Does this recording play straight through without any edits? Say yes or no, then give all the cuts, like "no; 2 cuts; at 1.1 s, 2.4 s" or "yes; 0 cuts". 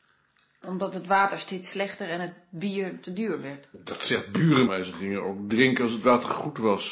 no; 1 cut; at 4.7 s